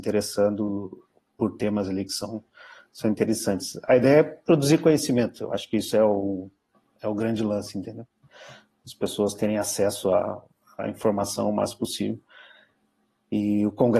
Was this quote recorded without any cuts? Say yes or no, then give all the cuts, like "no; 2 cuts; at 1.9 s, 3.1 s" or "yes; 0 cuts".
yes; 0 cuts